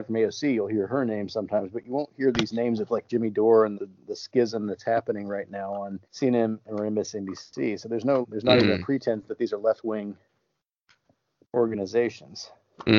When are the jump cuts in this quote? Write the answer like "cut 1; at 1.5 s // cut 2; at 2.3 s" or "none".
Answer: cut 1; at 3.7 s // cut 2; at 6.0 s // cut 3; at 8.2 s